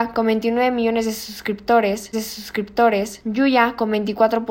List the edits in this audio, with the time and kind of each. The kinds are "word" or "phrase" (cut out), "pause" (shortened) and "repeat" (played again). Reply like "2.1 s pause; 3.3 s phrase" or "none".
2.1 s repeat